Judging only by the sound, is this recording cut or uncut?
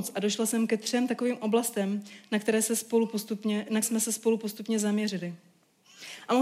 cut